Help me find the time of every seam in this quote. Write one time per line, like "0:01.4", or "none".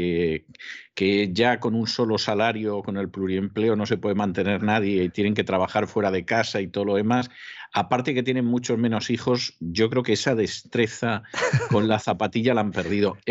none